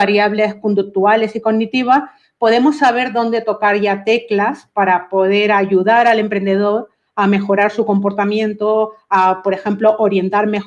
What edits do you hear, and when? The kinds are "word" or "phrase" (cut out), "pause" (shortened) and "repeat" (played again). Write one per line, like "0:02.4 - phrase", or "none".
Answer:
none